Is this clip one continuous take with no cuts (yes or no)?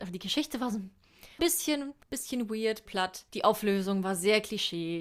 no